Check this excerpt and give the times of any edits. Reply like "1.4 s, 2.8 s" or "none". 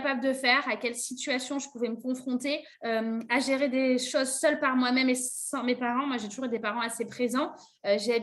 2.7 s